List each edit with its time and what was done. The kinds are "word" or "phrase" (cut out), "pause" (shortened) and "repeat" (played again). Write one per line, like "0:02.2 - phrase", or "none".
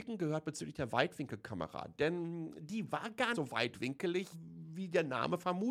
0:03.3 - word
0:04.3 - word